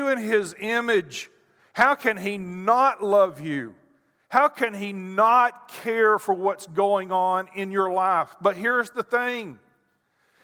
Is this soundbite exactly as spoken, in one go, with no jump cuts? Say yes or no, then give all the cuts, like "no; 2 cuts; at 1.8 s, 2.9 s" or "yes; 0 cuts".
yes; 0 cuts